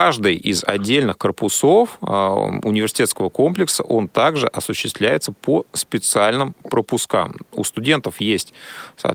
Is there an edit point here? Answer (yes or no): no